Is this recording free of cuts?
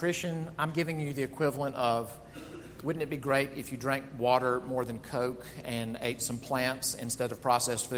yes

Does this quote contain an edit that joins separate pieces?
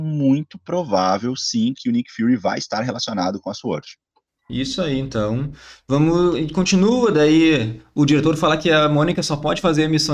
no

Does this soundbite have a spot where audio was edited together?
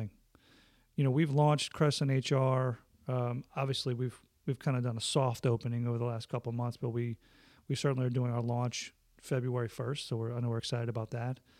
no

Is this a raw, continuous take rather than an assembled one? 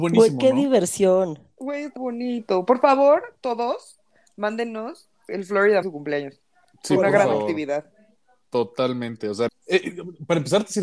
no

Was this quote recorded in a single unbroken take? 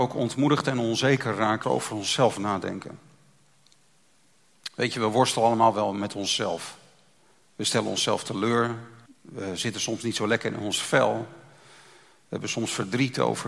no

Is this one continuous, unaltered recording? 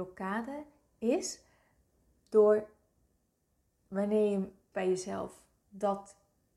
no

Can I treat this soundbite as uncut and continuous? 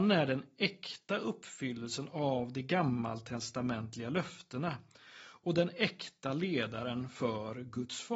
yes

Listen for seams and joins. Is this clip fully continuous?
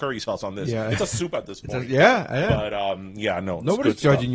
yes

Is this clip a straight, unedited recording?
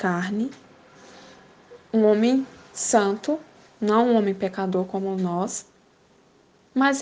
yes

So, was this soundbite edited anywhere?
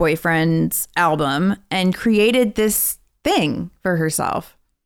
yes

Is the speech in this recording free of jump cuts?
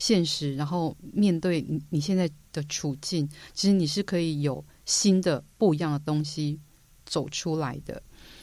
yes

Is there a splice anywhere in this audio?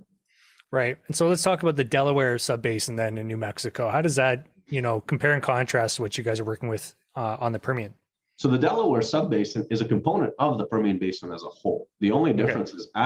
no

